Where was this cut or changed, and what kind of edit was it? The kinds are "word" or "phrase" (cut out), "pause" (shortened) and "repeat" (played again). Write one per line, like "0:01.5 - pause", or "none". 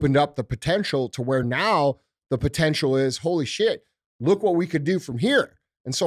none